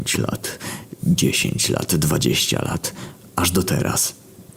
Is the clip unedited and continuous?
yes; 0 cuts

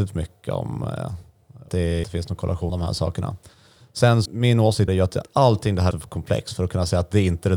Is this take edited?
yes; 7 cuts; at 1.7 s, 2.0 s, 2.7 s, 4.3 s, 4.9 s, 5.2 s, 5.9 s

